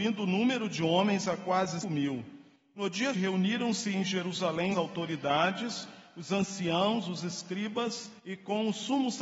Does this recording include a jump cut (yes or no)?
yes